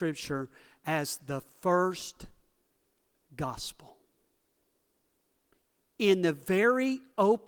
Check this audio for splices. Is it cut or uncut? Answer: uncut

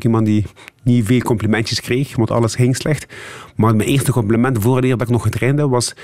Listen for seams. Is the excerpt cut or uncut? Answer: uncut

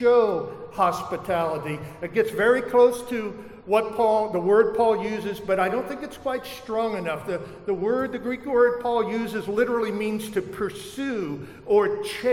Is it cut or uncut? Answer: uncut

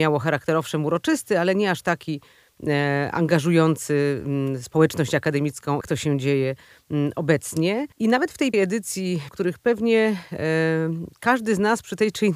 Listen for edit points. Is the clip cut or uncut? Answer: cut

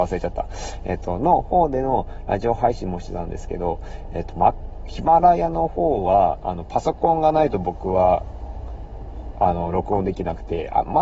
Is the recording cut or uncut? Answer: uncut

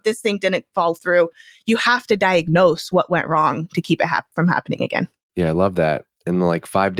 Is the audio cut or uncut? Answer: uncut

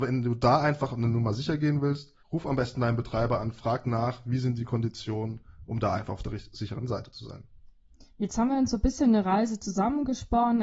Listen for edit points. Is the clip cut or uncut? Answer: cut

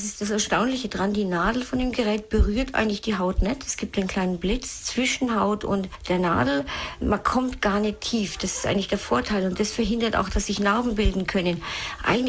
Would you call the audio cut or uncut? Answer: uncut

